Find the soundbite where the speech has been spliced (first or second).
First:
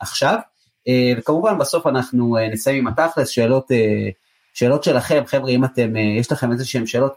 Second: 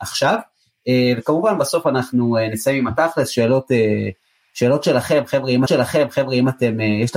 second